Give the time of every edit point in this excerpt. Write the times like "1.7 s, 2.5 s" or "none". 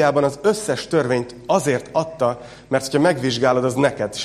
none